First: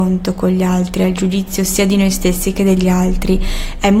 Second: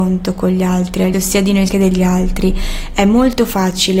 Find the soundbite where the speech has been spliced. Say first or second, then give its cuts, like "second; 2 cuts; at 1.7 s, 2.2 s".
second; 2 cuts; at 1.1 s, 1.7 s